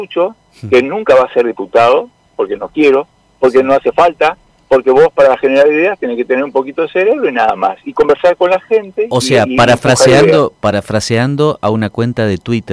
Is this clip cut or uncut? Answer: uncut